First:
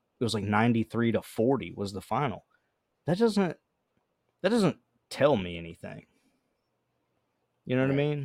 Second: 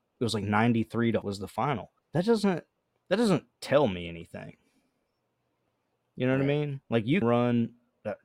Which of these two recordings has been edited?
second; 6 cuts; at 1.2 s, 2.0 s, 2.7 s, 3.5 s, 6.8 s, 7.2 s

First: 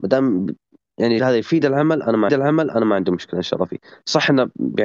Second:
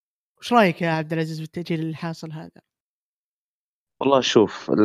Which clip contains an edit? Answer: first; 2 cuts; at 1.2 s, 2.3 s

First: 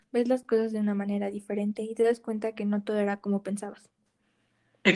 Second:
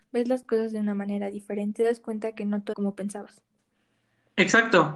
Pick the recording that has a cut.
second; 2 cuts; at 1.7 s, 2.7 s

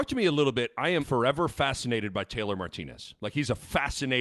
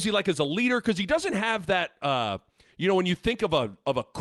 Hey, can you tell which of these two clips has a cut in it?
first; 1 cut; at 1.0 s

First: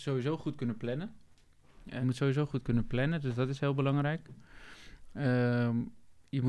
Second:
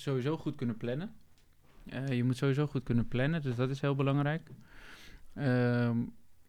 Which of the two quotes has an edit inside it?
first; 1 cut; at 2.0 s

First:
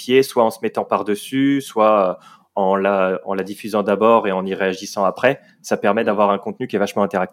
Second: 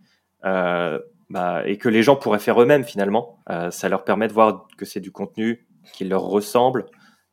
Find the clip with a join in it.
second; 1 cut; at 3.4 s

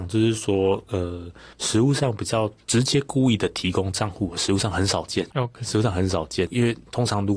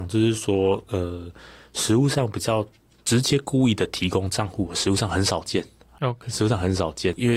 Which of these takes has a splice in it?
first; 3 cuts; at 1.5 s, 2.6 s, 5.3 s

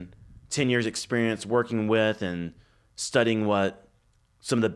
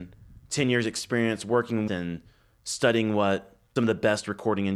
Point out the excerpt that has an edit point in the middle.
second; 2 cuts; at 1.9 s, 3.8 s

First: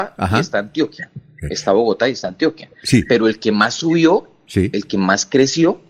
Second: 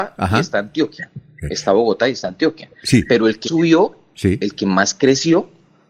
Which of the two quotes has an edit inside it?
second; 1 cut; at 3.4 s

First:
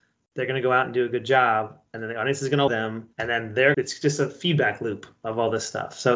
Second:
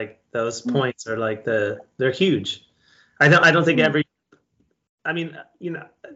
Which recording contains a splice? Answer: first; 3 cuts; at 2.7 s, 3.1 s, 3.7 s

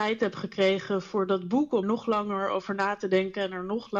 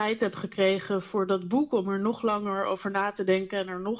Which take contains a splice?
first; 1 cut; at 1.8 s

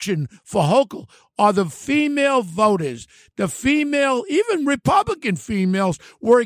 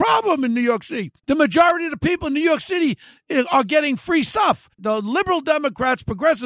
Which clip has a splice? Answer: second; 2 cuts; at 1.2 s, 4.7 s

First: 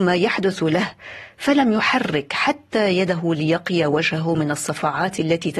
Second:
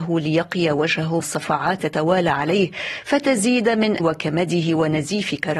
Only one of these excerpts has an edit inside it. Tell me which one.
second; 3 cuts; at 1.2 s, 1.8 s, 4.0 s

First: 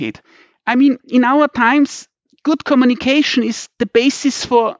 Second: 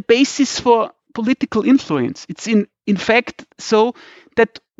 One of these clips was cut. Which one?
second; 1 cut; at 3.5 s

